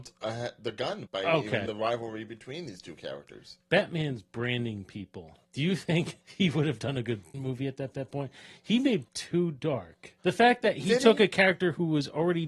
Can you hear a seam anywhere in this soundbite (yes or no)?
yes